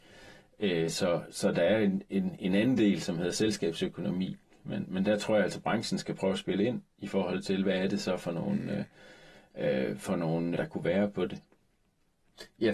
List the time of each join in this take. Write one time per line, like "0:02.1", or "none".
0:10.6